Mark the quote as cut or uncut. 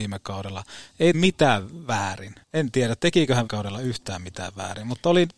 cut